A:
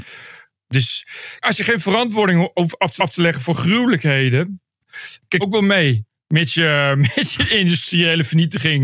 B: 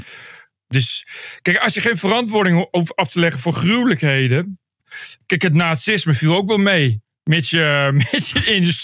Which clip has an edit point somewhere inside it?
A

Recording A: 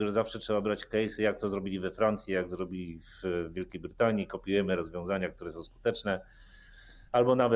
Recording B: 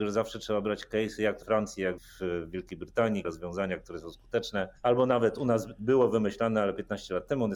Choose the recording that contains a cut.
B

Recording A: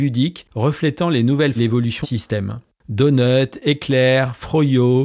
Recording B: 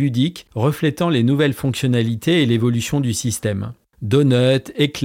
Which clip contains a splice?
A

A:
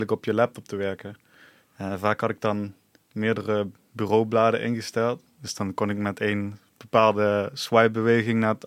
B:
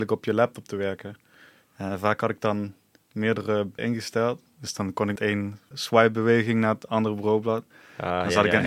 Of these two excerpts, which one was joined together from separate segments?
B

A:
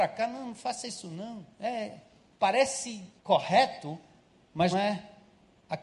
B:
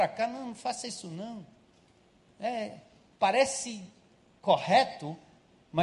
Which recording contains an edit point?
A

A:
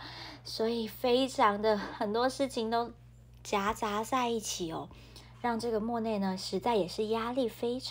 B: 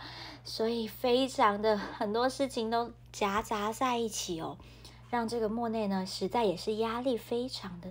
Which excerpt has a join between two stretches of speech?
B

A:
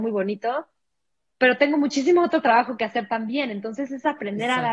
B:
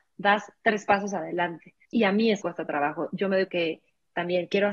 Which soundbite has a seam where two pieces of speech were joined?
B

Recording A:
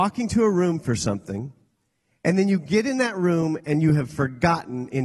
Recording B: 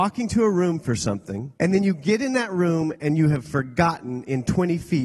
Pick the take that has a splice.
B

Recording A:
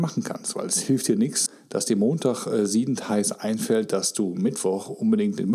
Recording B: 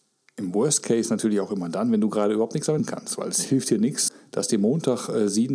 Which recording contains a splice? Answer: B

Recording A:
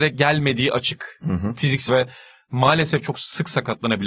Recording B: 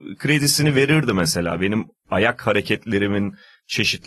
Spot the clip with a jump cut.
A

